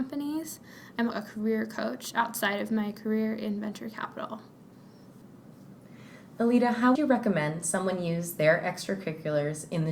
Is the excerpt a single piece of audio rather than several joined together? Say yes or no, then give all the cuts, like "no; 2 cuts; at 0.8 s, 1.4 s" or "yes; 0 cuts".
no; 2 cuts; at 1.1 s, 6.9 s